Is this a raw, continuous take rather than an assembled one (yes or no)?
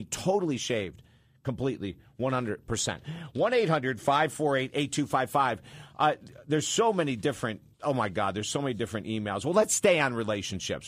no